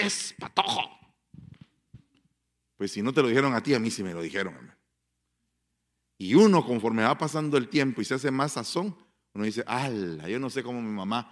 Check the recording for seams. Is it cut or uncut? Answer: uncut